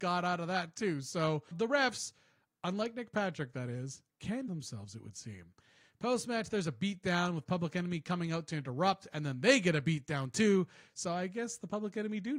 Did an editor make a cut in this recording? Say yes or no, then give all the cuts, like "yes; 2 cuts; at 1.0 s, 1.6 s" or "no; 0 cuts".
yes; 2 cuts; at 1.5 s, 4.5 s